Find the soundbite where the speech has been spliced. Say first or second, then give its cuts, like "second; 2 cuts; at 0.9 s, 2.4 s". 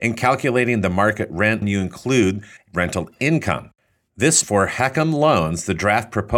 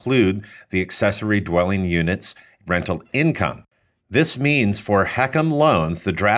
first; 3 cuts; at 1.6 s, 2.6 s, 4.4 s